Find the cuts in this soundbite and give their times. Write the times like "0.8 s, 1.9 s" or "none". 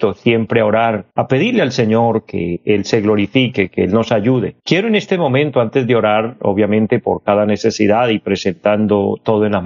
1.1 s, 4.6 s